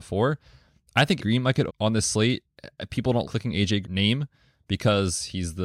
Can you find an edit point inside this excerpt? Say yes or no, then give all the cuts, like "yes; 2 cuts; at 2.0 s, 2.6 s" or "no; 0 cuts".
yes; 4 cuts; at 1.2 s, 1.7 s, 3.2 s, 3.8 s